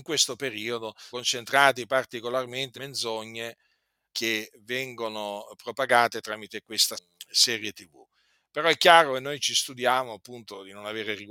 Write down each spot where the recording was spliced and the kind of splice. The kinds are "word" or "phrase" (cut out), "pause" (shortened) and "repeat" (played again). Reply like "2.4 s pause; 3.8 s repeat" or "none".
1.1 s word; 2.7 s word; 4.1 s word; 6.9 s word